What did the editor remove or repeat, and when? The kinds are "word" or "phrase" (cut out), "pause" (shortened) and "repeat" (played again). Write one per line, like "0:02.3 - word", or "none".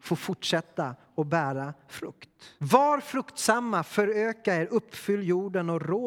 0:02.6 - pause